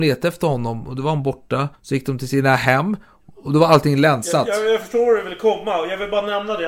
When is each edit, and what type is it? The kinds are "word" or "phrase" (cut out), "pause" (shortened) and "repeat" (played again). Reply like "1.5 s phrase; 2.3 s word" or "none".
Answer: 1.8 s pause